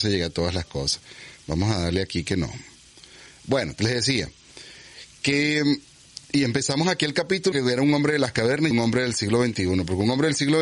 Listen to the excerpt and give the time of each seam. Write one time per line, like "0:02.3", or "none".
0:06.2
0:07.5
0:08.7